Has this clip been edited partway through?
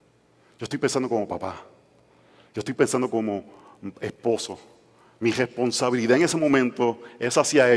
no; 0 cuts

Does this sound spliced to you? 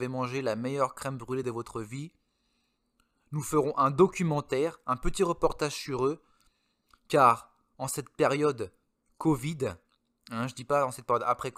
no; 0 cuts

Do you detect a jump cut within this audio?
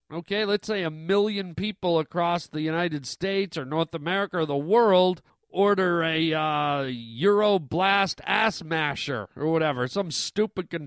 yes; 1 cut; at 5.3 s

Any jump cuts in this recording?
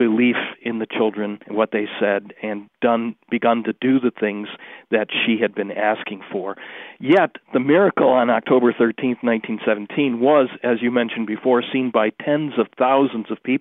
yes; 2 cuts; at 1.4 s, 2.4 s

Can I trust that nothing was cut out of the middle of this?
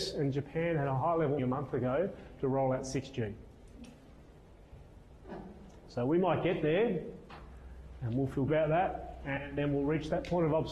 no; 2 cuts; at 1.4 s, 8.5 s

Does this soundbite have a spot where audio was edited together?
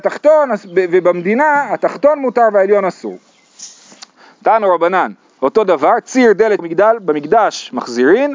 yes; 1 cut; at 6.6 s

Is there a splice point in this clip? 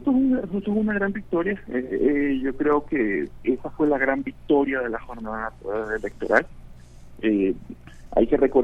no; 0 cuts

